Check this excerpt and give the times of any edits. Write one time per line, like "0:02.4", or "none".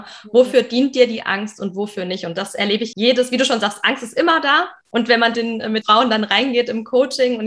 0:02.9
0:04.8
0:05.3
0:05.8

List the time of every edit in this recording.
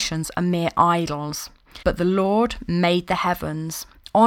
0:01.8

